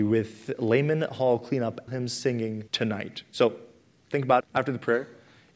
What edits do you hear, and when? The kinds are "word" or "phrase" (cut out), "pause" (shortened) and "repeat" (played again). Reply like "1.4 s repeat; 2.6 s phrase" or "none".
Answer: 1.9 s phrase; 2.7 s pause; 4.4 s word